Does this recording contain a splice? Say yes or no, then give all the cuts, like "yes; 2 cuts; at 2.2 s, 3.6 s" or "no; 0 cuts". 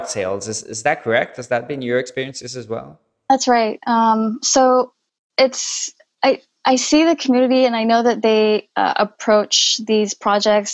no; 0 cuts